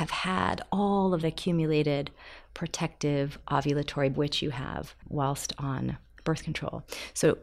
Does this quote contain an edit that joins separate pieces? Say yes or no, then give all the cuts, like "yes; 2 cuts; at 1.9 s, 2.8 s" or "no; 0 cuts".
yes; 3 cuts; at 1.2 s, 4.1 s, 5.0 s